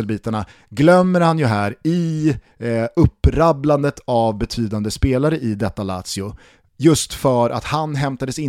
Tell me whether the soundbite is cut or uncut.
uncut